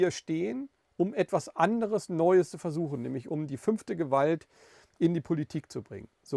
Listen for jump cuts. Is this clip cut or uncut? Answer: uncut